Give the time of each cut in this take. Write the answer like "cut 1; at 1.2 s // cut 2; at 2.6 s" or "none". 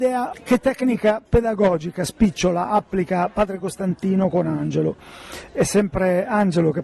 none